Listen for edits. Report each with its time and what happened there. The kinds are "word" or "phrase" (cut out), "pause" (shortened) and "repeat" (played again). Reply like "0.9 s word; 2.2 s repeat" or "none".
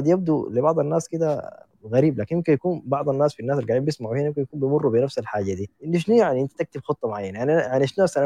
1.6 s pause; 5.8 s pause